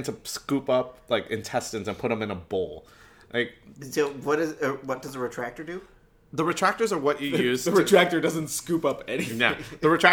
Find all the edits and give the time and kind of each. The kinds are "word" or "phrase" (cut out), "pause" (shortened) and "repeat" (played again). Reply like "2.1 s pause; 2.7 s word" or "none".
none